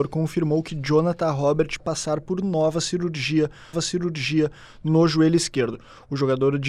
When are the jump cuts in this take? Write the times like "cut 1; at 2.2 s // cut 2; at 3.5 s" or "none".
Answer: cut 1; at 1.8 s // cut 2; at 3.7 s